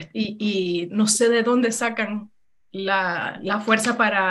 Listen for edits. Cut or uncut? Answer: uncut